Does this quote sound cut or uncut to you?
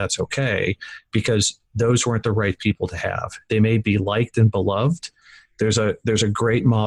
uncut